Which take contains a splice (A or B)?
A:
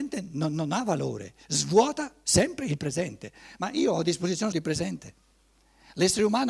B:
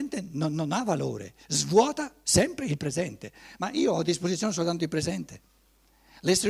A